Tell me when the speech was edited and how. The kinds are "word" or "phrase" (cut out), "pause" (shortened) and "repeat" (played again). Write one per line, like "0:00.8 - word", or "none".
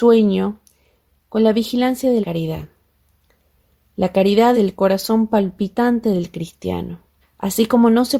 0:02.2 - word
0:04.5 - word
0:07.2 - pause